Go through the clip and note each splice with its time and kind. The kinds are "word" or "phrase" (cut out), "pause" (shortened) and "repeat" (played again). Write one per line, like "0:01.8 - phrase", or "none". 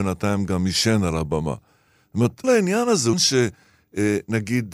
0:02.4 - word
0:03.1 - word